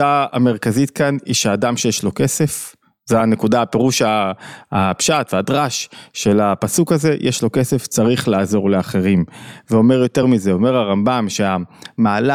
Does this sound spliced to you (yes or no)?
no